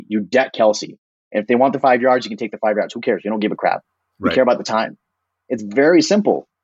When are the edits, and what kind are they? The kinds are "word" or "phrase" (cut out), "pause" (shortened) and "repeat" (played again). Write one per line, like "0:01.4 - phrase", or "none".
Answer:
none